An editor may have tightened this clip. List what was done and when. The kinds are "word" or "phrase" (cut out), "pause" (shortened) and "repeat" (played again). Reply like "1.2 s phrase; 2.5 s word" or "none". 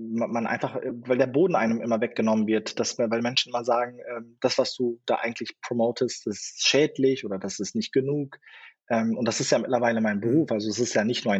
none